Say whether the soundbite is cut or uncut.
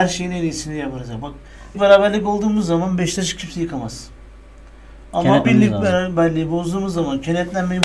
cut